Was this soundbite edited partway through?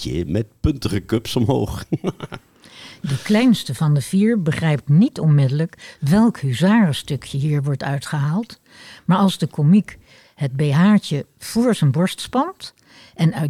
no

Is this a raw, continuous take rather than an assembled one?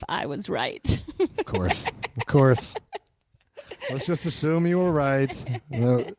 yes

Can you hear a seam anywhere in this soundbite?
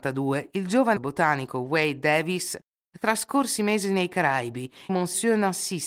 yes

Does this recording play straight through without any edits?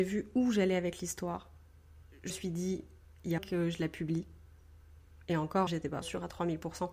no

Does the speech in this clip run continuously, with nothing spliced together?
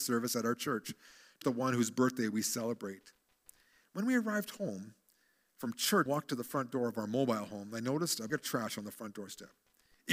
no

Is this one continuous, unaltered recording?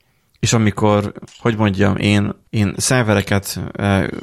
no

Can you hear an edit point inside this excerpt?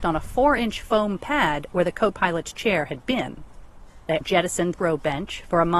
yes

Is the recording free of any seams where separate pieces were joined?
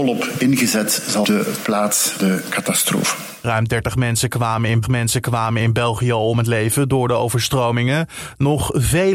no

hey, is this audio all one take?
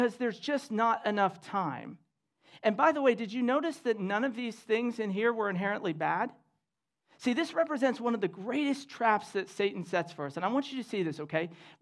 yes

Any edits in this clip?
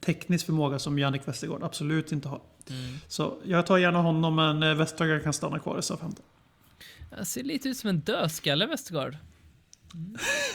no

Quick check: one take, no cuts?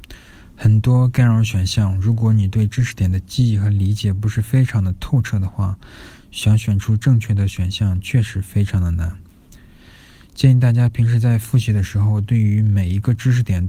yes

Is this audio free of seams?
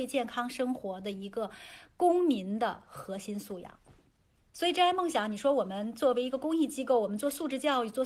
no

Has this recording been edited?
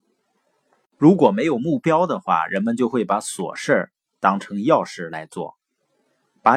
no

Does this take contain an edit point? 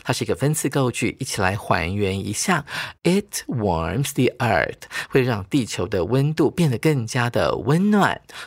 no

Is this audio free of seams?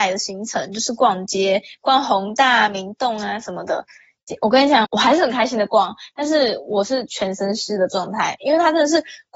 no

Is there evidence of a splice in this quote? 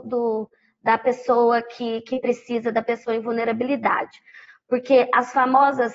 no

